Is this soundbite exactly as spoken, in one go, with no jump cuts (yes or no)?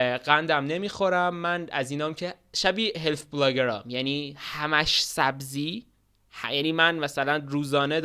yes